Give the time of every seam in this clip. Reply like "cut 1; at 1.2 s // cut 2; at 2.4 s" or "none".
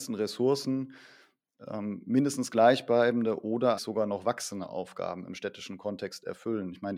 cut 1; at 3.8 s